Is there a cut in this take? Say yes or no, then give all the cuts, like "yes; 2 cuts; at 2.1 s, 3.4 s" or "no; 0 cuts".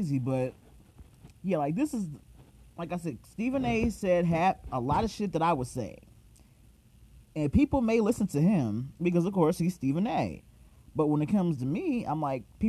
yes; 2 cuts; at 1.4 s, 9.0 s